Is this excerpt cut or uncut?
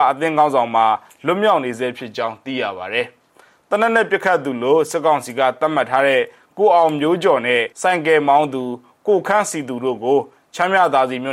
cut